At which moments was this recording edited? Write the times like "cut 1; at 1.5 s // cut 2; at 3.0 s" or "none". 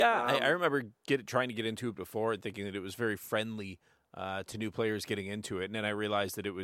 none